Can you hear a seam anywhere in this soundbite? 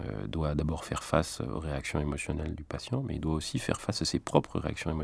no; 0 cuts

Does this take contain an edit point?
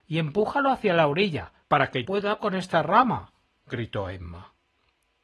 yes; 3 cuts; at 1.6 s, 2.1 s, 2.4 s

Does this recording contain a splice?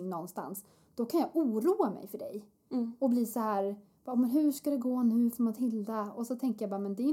no; 0 cuts

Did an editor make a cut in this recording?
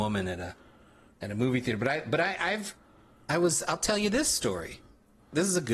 no; 0 cuts

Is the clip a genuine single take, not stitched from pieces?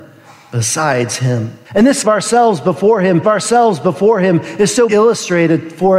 no; 4 cuts; at 1.6 s, 2.0 s, 3.2 s, 4.9 s

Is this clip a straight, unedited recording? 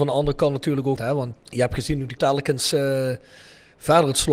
no; 3 cuts; at 1.0 s, 1.3 s, 2.2 s

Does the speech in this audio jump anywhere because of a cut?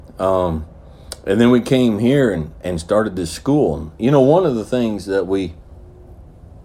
no; 0 cuts

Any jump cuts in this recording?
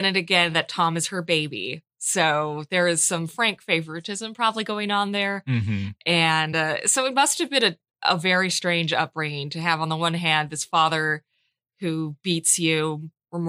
no; 0 cuts

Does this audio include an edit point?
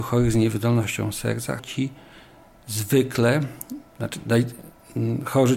yes; 2 cuts; at 1.6 s, 3.9 s

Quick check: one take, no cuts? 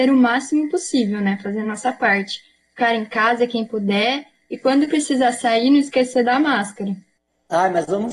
yes; 0 cuts

